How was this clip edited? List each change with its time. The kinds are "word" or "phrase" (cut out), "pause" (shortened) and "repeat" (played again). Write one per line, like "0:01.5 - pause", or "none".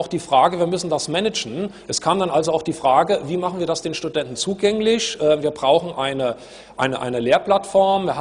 none